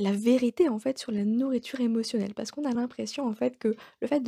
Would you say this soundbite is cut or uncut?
uncut